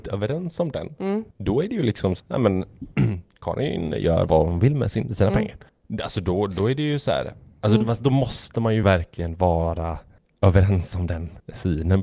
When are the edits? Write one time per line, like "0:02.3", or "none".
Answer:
0:01.3
0:02.2
0:08.8